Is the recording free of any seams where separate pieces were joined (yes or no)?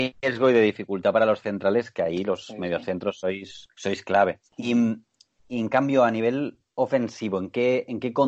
no